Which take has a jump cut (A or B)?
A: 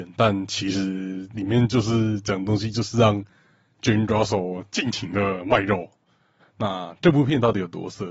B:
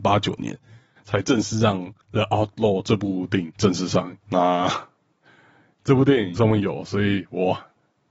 B